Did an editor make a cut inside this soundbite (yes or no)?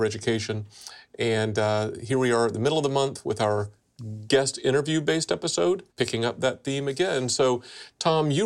yes